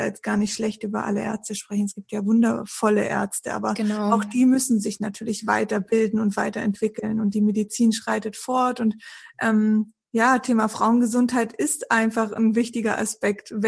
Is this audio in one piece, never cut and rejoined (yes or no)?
no